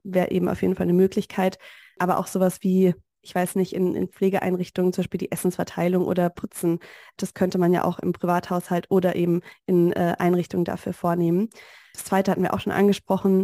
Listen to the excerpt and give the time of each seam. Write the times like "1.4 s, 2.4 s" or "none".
none